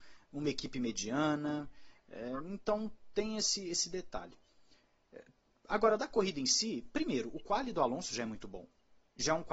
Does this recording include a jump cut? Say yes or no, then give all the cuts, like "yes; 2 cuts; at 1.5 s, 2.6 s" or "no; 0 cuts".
no; 0 cuts